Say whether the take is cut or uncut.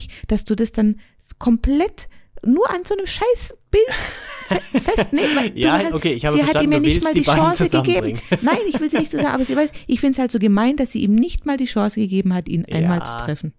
uncut